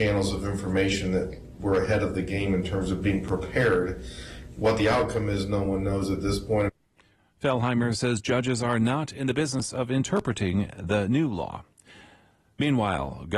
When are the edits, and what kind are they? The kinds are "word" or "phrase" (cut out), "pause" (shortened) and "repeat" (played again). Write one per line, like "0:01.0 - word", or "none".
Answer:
none

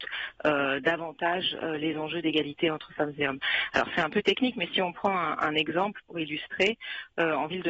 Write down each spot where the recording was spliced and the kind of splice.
none

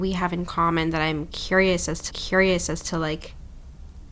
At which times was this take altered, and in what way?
0:02.1 - repeat

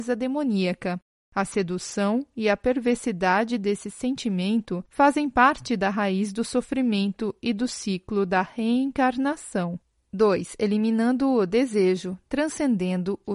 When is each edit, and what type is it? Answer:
none

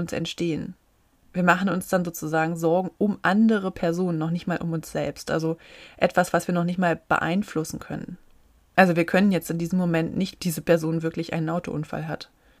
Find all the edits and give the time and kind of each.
0:10.4 - phrase

